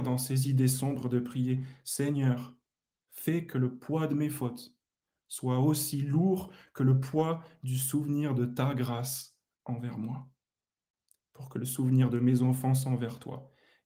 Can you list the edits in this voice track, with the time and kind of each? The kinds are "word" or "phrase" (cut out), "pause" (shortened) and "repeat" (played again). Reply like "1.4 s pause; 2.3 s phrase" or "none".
none